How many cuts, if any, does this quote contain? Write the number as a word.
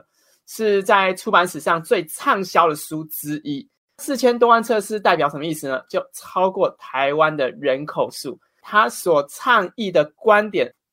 zero